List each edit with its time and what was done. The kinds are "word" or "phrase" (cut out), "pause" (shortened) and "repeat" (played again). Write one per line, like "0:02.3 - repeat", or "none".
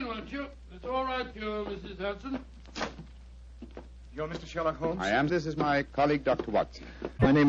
0:01.3 - word
0:05.3 - phrase